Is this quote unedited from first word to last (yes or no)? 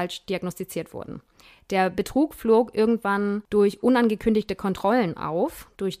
yes